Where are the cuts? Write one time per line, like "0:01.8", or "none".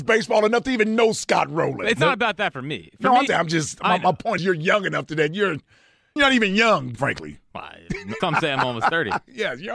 0:03.3
0:04.4
0:06.2
0:07.0
0:08.2